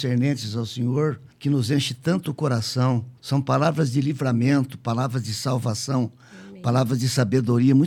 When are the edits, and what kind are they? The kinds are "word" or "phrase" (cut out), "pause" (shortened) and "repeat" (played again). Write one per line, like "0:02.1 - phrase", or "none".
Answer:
0:01.3 - pause
0:03.2 - pause